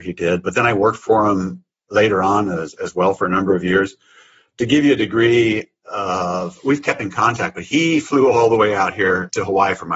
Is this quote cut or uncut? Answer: uncut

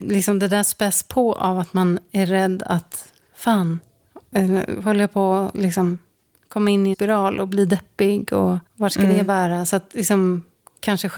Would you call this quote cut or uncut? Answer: cut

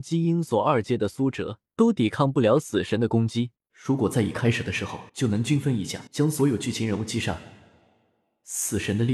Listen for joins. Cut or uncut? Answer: cut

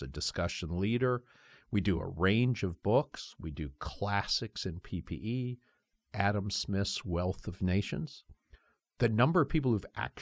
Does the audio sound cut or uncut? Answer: uncut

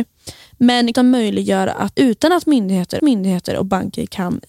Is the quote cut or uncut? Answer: cut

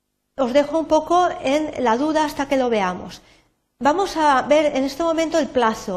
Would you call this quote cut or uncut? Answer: uncut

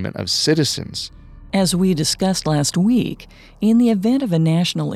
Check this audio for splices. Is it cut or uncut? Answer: uncut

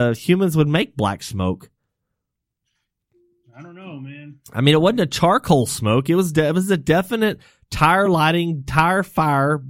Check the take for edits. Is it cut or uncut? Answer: uncut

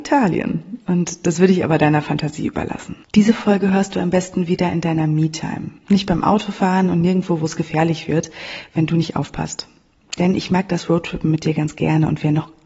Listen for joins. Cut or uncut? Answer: cut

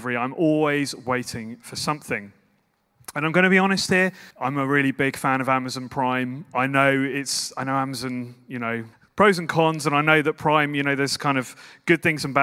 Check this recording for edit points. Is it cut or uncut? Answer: cut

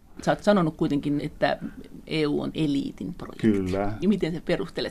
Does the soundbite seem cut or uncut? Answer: cut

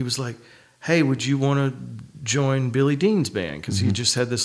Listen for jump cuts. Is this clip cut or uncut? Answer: uncut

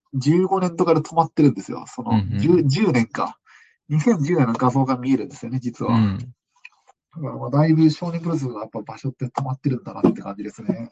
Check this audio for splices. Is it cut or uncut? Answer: uncut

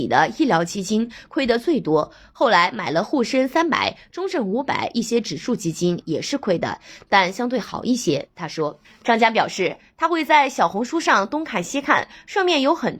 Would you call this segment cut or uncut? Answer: cut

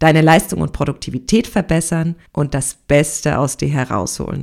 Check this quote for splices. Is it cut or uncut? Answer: cut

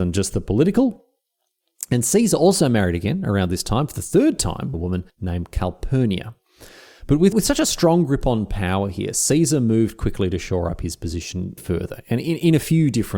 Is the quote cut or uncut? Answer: cut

